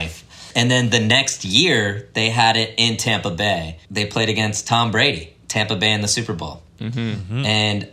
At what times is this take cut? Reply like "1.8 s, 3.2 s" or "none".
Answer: 3.8 s, 6.7 s